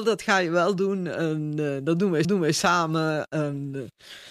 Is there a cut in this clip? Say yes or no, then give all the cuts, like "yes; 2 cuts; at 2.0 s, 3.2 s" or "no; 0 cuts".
yes; 1 cut; at 2.2 s